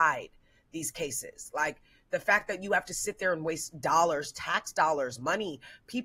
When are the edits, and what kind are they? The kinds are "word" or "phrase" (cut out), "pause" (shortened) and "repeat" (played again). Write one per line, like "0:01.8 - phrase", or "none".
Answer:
none